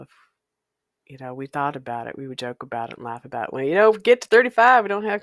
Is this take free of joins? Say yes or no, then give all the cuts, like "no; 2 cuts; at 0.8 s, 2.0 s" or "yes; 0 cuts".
yes; 0 cuts